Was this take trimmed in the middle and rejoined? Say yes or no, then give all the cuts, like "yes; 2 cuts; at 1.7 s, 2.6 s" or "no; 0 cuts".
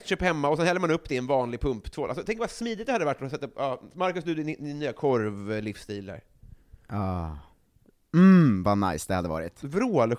no; 0 cuts